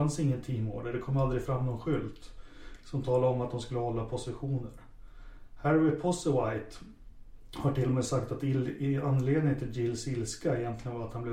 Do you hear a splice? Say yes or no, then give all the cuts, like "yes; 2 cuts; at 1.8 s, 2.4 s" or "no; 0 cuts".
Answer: no; 0 cuts